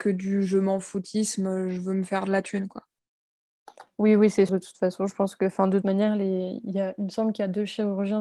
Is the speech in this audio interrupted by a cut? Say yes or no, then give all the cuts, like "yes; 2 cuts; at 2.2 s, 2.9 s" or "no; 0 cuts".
yes; 2 cuts; at 4.5 s, 5.8 s